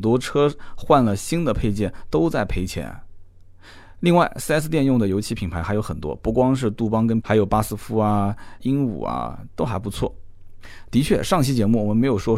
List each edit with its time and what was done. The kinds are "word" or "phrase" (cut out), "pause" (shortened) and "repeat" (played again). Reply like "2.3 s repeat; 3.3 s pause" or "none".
7.2 s word; 8.6 s phrase